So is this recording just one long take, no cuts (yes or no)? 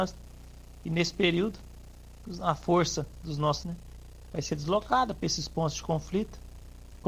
no